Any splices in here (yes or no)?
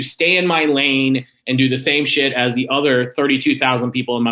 no